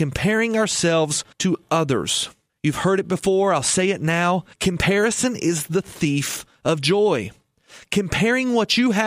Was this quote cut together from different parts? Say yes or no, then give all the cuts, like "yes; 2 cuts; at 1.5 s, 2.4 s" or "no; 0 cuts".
yes; 3 cuts; at 1.3 s, 2.5 s, 4.5 s